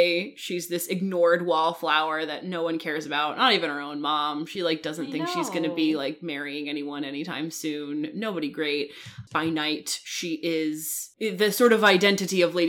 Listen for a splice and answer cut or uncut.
uncut